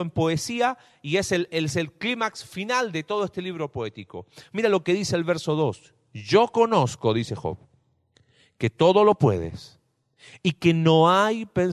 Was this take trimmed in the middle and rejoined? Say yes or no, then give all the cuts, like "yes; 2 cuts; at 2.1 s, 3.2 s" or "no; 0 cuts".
no; 0 cuts